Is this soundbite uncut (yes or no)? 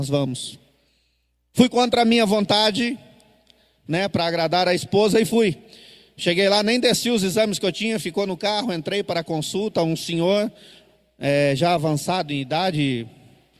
yes